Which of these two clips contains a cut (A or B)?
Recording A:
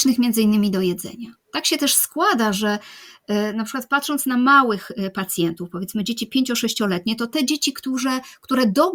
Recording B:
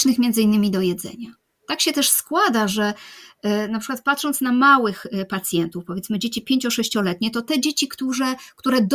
A